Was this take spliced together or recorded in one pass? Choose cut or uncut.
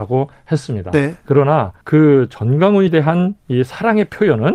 cut